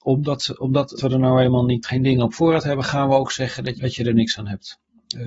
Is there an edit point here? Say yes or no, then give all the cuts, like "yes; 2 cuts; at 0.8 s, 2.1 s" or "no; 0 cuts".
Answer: yes; 3 cuts; at 1.0 s, 1.8 s, 3.7 s